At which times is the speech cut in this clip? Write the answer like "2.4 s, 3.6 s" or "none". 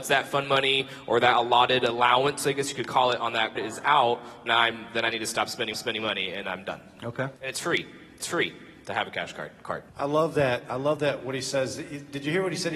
3.6 s, 4.5 s, 5.7 s, 6.4 s, 7.4 s, 8.2 s, 9.9 s

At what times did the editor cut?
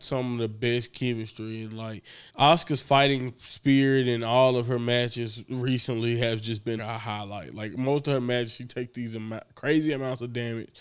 2.3 s, 6.8 s

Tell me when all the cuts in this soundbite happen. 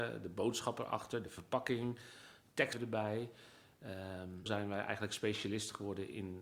2.7 s, 4.5 s

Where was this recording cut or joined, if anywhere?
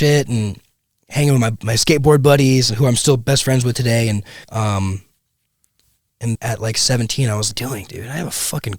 4.4 s, 6.4 s, 7.5 s

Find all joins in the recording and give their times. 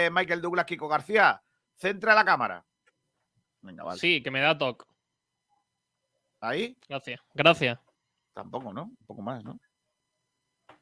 none

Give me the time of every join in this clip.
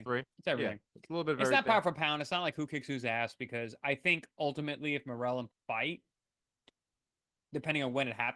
5.5 s

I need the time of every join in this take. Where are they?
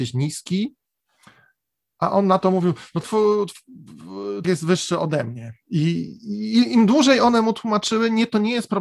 3.0 s, 4.4 s

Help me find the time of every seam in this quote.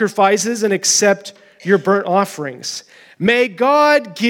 none

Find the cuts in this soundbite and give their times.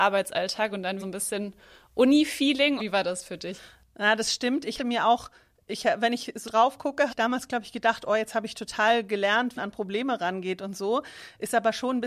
1.0 s, 2.8 s, 4.8 s, 6.4 s, 7.1 s, 9.6 s

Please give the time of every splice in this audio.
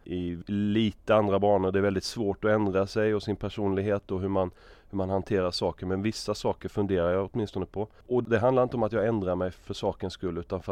none

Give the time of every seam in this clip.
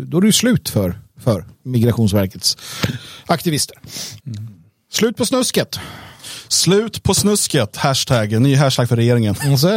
4.2 s

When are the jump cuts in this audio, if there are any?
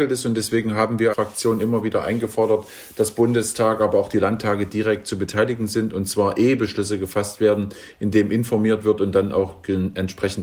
1.1 s

